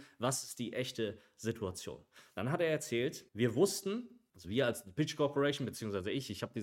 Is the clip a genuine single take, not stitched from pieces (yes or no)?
no